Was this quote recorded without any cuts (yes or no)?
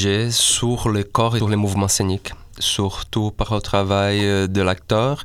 no